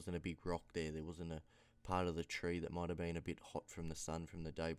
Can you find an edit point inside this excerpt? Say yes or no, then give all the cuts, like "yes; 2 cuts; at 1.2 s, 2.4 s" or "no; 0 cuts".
no; 0 cuts